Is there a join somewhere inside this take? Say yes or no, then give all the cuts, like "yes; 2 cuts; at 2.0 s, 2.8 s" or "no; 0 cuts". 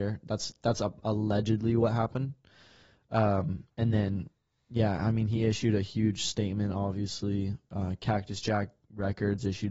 no; 0 cuts